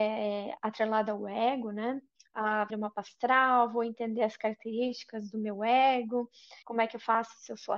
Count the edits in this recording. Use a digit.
2